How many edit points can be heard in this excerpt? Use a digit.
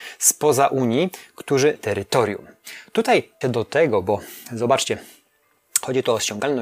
2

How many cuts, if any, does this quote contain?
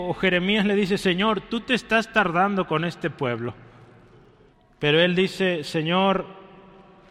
1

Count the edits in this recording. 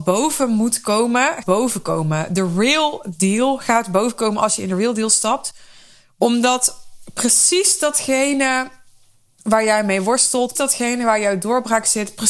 2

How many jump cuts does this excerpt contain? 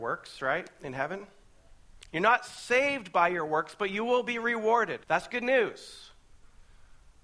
1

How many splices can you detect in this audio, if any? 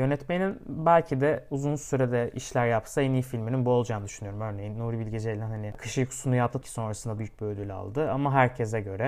2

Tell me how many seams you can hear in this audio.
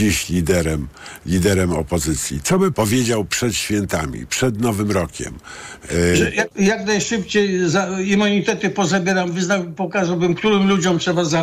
2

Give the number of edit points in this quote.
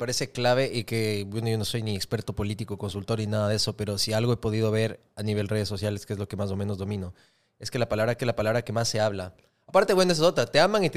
1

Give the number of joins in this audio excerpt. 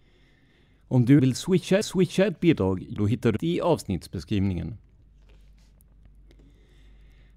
4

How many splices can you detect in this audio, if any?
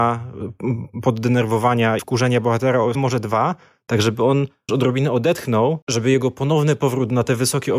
4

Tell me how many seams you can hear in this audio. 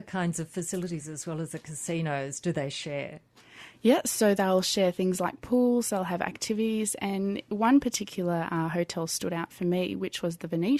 0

